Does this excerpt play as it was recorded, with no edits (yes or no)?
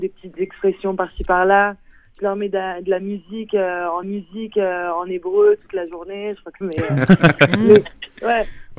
no